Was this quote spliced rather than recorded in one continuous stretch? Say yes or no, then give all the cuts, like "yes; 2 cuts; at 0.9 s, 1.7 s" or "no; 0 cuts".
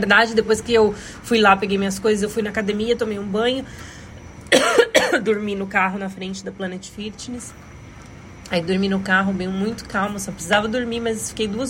no; 0 cuts